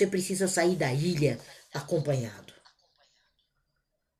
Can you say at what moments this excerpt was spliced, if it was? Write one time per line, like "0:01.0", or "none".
none